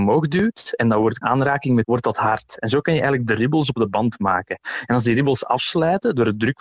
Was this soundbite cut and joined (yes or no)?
yes